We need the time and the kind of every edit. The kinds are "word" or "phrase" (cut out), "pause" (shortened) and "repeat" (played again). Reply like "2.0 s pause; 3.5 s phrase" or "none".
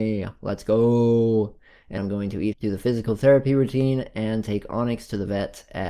2.0 s word; 2.5 s word